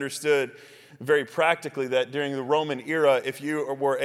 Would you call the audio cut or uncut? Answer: uncut